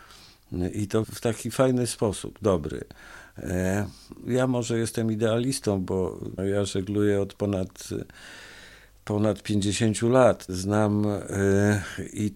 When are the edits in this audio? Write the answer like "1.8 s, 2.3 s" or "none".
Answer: 1.0 s, 4.2 s, 6.4 s, 10.5 s